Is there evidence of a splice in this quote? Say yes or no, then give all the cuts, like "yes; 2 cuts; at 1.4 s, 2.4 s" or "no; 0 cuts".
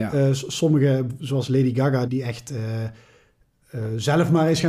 yes; 1 cut; at 2.1 s